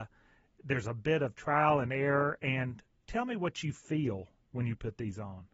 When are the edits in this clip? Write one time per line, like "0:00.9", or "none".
none

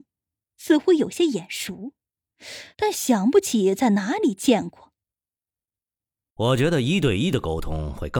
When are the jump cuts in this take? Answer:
0:02.7

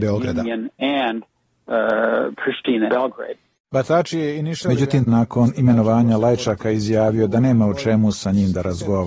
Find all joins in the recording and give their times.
0:02.9
0:03.9
0:05.1

